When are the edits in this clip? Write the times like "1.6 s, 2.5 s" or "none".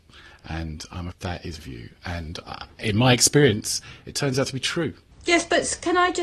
1.1 s, 1.6 s, 2.4 s